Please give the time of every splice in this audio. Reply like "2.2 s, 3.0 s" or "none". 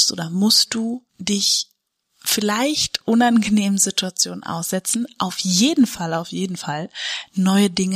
1.1 s